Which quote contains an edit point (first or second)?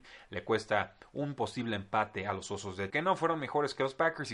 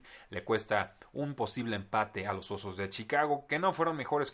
first